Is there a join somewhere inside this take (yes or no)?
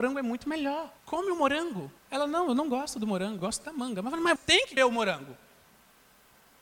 yes